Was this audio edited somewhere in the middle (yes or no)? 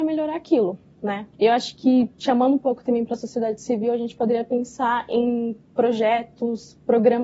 yes